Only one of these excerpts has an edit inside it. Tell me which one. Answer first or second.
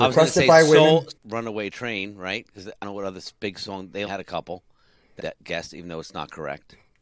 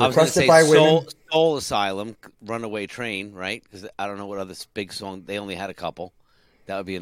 first